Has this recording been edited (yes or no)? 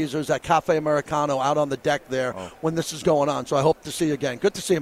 no